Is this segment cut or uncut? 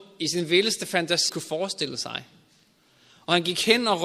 cut